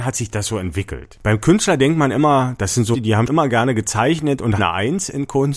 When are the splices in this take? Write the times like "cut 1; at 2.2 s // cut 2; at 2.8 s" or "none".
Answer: cut 1; at 2.9 s // cut 2; at 3.3 s // cut 3; at 4.6 s